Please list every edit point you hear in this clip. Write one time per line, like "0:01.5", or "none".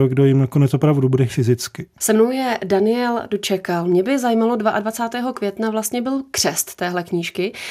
0:01.3